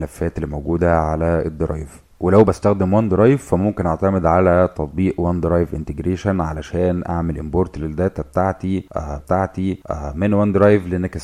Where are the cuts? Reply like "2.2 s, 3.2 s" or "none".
9.2 s